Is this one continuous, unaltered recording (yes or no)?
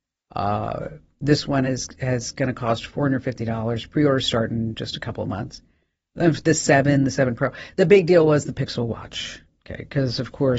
yes